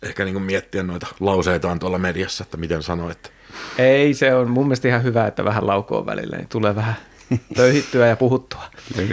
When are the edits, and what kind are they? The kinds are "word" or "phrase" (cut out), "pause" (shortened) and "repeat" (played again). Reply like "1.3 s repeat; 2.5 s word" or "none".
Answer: none